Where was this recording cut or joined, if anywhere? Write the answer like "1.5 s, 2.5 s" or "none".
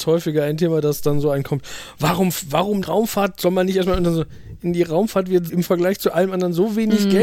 2.8 s, 5.5 s